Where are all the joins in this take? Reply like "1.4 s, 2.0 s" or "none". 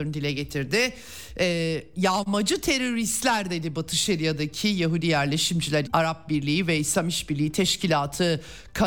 5.9 s